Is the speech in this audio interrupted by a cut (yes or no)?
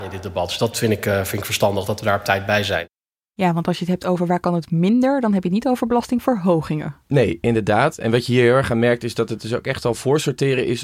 no